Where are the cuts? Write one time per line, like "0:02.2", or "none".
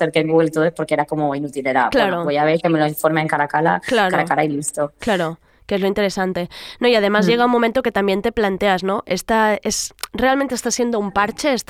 none